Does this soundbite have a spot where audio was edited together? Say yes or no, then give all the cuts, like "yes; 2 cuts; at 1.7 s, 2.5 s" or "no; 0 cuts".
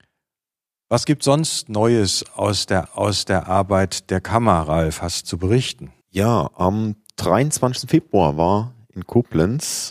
yes; 3 cuts; at 2.9 s, 5.2 s, 6.0 s